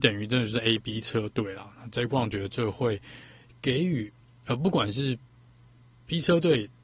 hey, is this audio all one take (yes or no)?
yes